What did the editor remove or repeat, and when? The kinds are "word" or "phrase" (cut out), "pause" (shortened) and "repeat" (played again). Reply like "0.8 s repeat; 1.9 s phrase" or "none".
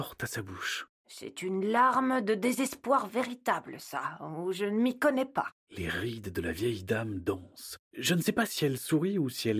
0.9 s pause; 5.6 s pause; 7.9 s pause